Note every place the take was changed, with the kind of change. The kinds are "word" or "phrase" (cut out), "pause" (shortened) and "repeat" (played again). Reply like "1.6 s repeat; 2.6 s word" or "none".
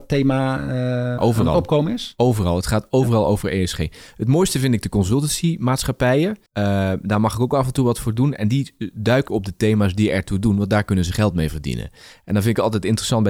1.2 s word; 6.5 s pause; 9.3 s word